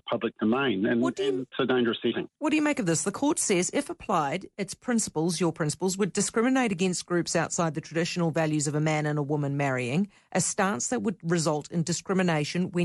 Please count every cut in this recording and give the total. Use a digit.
2